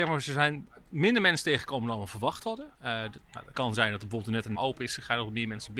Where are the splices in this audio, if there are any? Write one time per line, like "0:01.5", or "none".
0:02.7
0:03.5
0:04.5